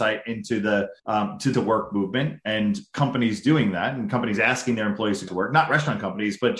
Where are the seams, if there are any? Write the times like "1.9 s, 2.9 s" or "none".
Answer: 1.0 s, 1.5 s, 5.3 s